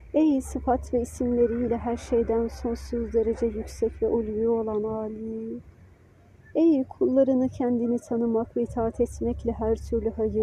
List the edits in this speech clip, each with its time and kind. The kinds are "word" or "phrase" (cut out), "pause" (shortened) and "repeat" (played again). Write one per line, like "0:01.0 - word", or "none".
none

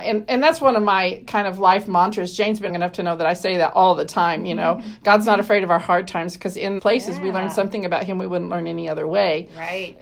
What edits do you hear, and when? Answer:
0:02.7 - phrase
0:06.8 - word

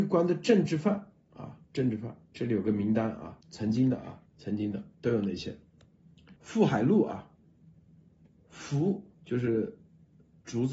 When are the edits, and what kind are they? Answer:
0:01.6 - pause
0:02.2 - pause
0:03.4 - pause
0:04.3 - pause
0:04.9 - pause
0:06.4 - pause
0:09.1 - pause

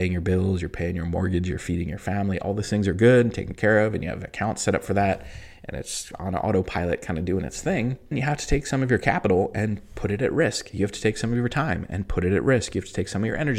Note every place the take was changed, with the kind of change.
0:08.1 - word

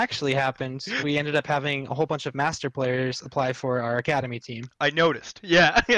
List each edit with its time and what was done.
0:01.0 - word

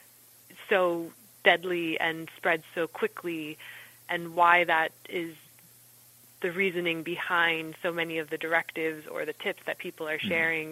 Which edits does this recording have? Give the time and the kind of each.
none

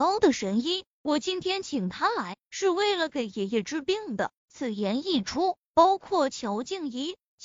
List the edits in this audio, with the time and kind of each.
0:04.4 - pause

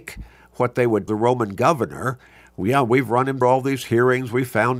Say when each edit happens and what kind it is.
0:01.1 - word
0:03.4 - word

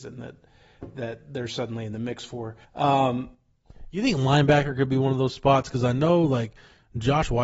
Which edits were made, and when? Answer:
0:02.6 - pause

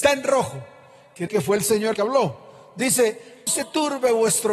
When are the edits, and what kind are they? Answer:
0:01.3 - word
0:01.9 - word
0:03.5 - word

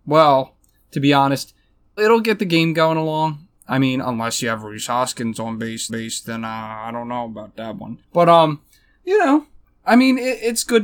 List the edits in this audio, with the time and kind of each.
0:02.0 - word
0:05.9 - repeat
0:08.0 - pause

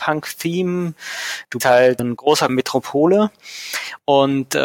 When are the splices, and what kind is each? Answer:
0:01.6 - word
0:02.0 - word
0:02.5 - phrase

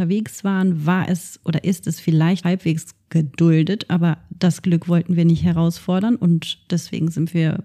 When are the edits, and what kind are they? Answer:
0:02.4 - word

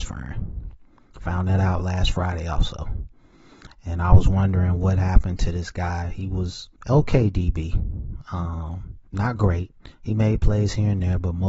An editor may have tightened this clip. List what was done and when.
0:06.8 - pause
0:09.1 - pause
0:09.9 - pause

